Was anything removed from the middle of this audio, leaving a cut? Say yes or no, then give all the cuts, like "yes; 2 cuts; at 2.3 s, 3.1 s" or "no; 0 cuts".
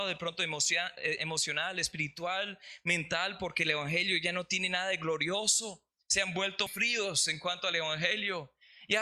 yes; 1 cut; at 6.7 s